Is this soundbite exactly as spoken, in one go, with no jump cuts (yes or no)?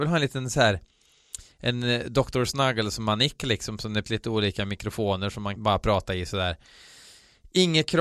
no